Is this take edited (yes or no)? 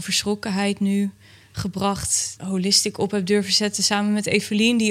yes